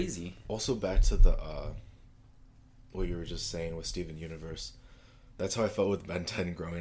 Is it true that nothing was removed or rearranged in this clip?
yes; 0 cuts

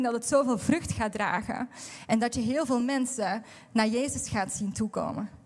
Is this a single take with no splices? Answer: yes; 0 cuts

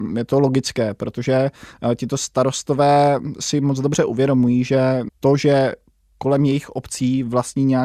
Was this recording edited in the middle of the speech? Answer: no; 0 cuts

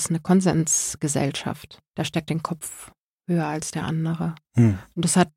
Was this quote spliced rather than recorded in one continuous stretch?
yes; 3 cuts; at 2.3 s, 3.0 s, 4.4 s

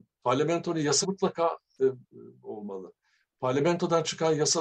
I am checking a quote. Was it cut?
yes; 2 cuts; at 1.0 s, 2.0 s

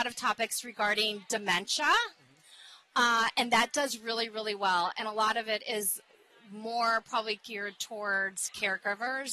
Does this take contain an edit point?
no; 0 cuts

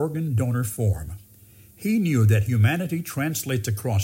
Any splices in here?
no; 0 cuts

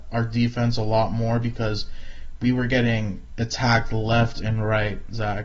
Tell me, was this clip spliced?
no; 0 cuts

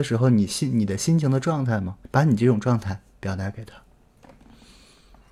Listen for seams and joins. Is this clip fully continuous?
no; 1 cut; at 2.0 s

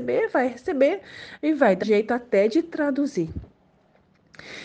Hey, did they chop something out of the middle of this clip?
yes; 1 cut; at 1.8 s

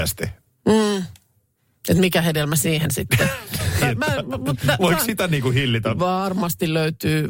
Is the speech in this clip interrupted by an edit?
yes; 1 cut; at 3.8 s

